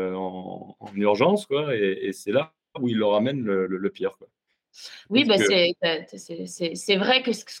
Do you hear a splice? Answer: no; 0 cuts

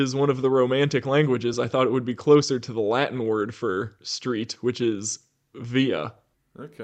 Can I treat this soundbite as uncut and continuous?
yes; 0 cuts

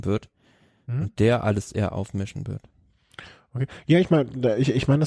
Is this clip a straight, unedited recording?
yes; 0 cuts

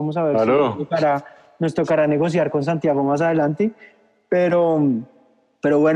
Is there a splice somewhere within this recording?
no; 0 cuts

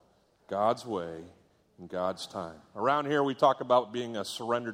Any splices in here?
no; 0 cuts

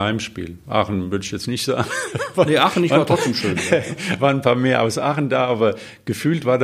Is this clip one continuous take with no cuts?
yes; 0 cuts

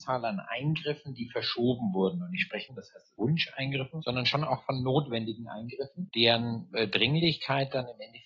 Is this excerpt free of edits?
no; 2 cuts; at 2.7 s, 3.2 s

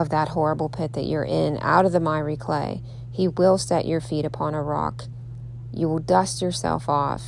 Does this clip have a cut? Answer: no; 0 cuts

